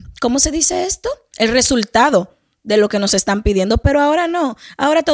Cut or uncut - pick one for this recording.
uncut